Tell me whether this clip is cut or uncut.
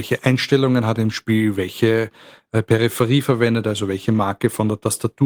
uncut